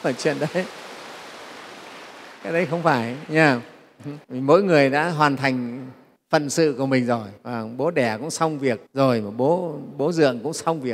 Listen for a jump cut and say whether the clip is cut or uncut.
cut